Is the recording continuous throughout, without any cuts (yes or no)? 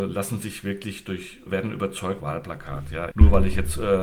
no